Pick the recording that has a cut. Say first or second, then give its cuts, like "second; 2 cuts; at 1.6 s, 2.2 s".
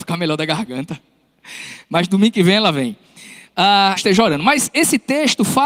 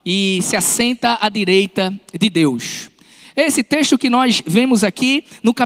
first; 1 cut; at 4.0 s